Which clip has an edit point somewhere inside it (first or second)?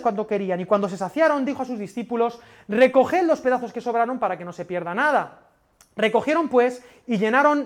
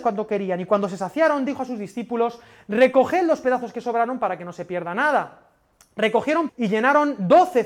second